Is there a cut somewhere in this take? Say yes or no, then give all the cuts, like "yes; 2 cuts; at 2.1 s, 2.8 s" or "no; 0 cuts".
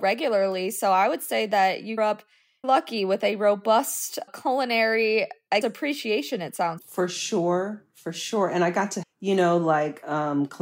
yes; 6 cuts; at 2.0 s, 2.6 s, 4.3 s, 5.6 s, 6.8 s, 9.0 s